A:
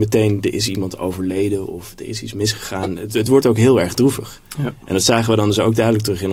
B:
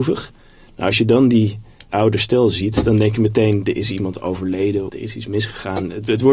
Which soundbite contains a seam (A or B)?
B